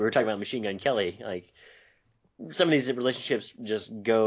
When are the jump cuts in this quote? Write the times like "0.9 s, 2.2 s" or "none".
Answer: none